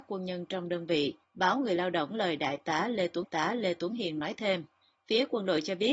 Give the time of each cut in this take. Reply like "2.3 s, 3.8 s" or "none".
1.2 s, 2.1 s, 3.2 s, 4.8 s